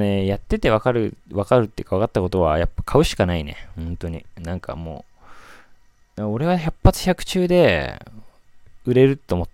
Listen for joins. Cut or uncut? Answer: uncut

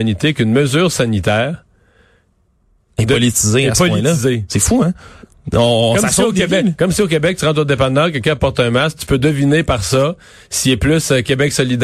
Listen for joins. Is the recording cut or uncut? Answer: uncut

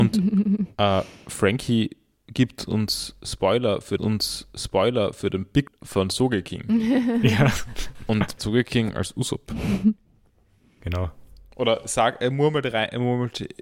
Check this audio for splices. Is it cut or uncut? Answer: cut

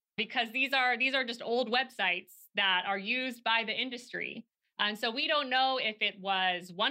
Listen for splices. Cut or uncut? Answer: uncut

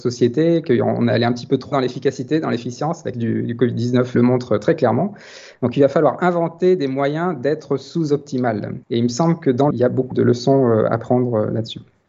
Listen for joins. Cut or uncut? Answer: cut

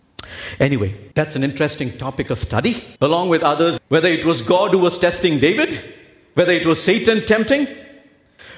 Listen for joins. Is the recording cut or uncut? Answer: cut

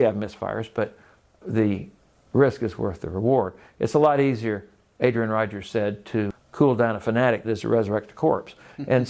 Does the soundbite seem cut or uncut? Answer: cut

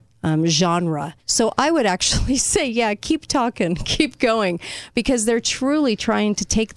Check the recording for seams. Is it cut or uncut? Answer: cut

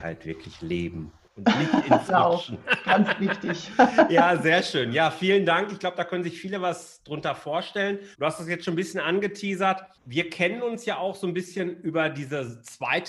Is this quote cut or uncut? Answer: cut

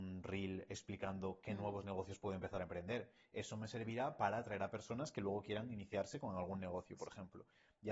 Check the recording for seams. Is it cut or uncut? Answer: uncut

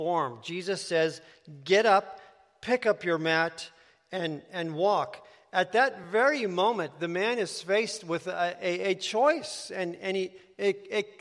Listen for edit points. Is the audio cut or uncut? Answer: uncut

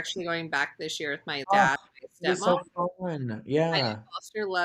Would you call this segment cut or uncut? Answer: cut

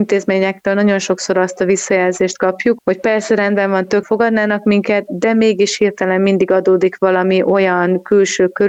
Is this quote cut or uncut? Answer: cut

